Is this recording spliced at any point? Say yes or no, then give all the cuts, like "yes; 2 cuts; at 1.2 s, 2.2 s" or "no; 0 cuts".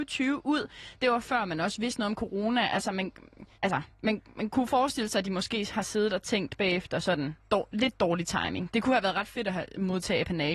yes; 2 cuts; at 3.5 s, 7.4 s